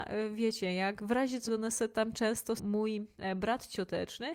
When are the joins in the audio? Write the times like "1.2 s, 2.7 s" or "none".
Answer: 1.5 s, 2.6 s